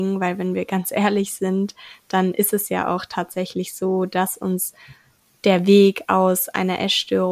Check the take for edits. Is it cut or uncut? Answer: uncut